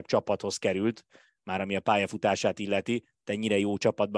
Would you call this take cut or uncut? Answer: uncut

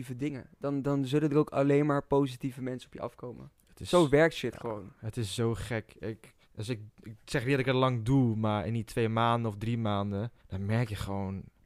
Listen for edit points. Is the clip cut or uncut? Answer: cut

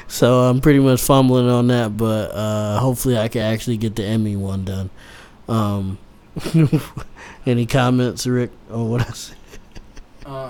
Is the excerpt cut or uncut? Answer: uncut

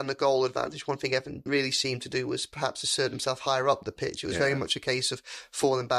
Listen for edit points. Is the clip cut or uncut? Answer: cut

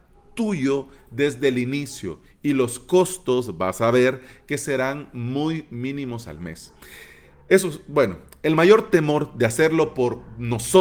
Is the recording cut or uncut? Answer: uncut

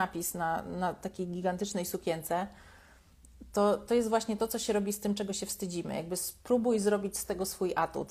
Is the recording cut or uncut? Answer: uncut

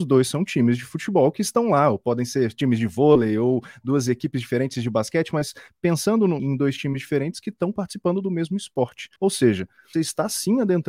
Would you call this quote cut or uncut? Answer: cut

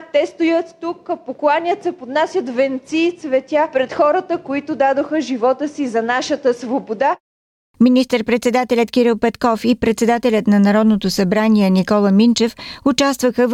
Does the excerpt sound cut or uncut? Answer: uncut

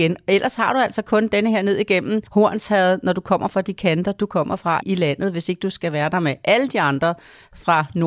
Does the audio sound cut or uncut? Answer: cut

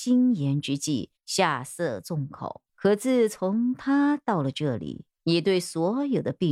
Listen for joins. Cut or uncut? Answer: cut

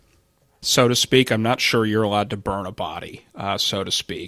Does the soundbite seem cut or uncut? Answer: uncut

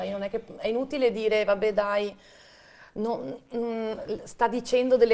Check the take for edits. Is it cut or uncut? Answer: uncut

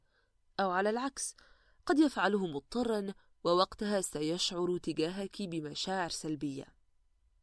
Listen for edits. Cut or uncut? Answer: uncut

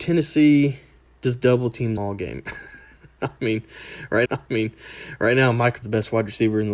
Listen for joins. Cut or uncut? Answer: cut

